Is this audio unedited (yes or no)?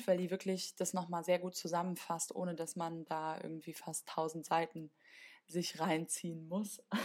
yes